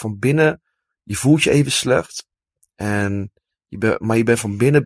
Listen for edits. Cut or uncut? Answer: uncut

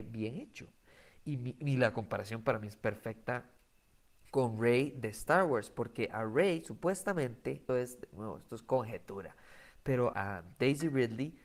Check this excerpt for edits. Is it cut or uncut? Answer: cut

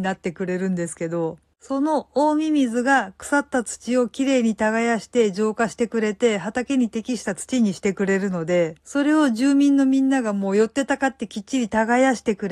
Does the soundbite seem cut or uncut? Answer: cut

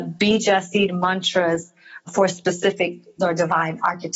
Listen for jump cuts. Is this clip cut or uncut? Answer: cut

